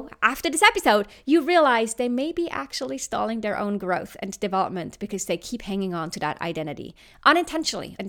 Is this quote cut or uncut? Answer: uncut